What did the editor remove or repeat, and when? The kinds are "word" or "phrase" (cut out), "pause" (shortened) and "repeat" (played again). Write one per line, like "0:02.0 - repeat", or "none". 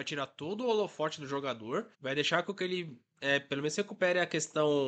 0:01.9 - pause